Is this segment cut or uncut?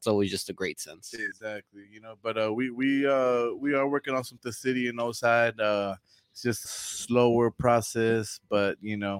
cut